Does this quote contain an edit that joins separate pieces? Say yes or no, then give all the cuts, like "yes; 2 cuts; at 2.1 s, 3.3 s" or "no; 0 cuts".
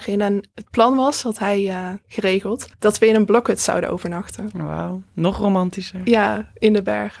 yes; 1 cut; at 2.7 s